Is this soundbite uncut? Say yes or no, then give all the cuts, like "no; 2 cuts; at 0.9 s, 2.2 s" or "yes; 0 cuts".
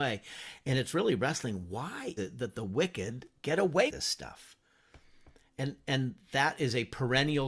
no; 2 cuts; at 2.2 s, 3.9 s